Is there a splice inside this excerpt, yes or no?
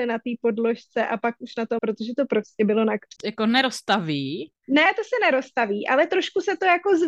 yes